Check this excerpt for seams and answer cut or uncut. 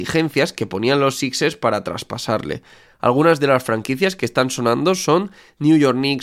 uncut